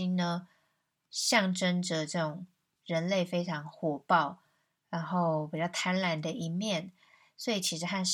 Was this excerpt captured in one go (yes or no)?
yes